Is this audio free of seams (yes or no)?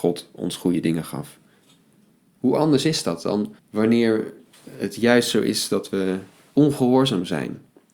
no